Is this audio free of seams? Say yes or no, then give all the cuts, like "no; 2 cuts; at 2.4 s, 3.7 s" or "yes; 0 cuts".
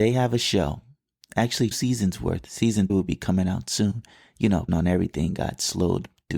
no; 3 cuts; at 1.7 s, 2.9 s, 4.7 s